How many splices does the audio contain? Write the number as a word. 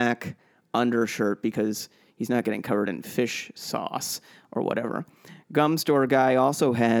zero